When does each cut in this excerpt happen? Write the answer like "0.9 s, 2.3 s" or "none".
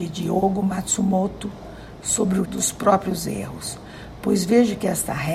2.4 s